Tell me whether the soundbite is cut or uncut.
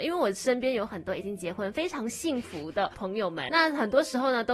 cut